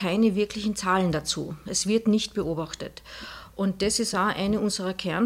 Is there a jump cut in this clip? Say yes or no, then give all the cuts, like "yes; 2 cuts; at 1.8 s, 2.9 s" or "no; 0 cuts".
no; 0 cuts